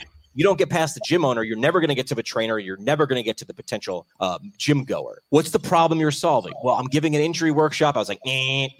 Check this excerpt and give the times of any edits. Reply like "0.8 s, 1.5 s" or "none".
4.1 s, 5.2 s